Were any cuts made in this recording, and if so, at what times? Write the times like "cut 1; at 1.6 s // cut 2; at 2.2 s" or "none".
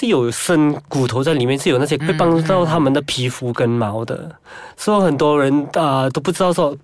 cut 1; at 2.0 s